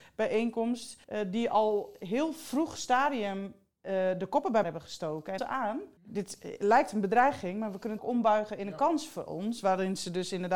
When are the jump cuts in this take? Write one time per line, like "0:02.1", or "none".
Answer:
0:01.0
0:04.6
0:05.4
0:06.0
0:08.0